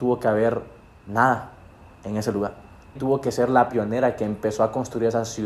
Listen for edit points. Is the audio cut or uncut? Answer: cut